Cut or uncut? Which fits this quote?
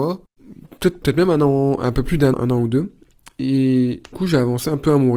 cut